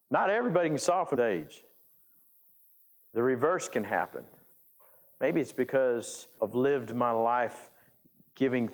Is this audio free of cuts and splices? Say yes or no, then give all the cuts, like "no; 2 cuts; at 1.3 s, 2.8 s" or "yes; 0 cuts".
no; 2 cuts; at 1.1 s, 6.4 s